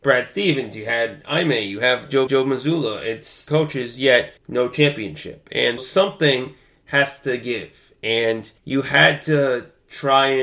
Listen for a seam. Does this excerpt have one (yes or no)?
yes